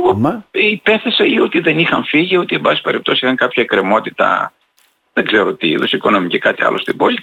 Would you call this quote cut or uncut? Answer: uncut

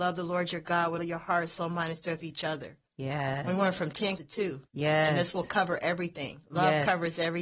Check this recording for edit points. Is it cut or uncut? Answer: cut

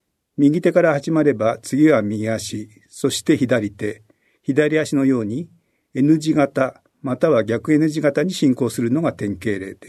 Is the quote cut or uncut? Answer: uncut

